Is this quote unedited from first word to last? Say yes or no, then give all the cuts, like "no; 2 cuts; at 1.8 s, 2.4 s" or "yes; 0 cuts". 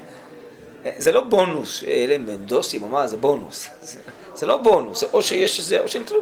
yes; 0 cuts